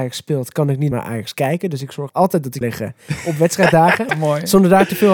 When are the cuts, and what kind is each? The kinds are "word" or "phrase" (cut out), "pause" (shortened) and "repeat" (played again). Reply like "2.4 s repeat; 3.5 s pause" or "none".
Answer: 0.9 s word; 2.1 s word; 2.6 s word; 4.1 s word